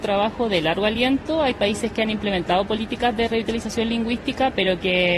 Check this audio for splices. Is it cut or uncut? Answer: uncut